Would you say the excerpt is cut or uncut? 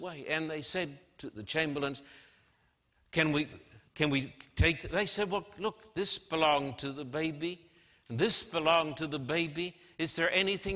cut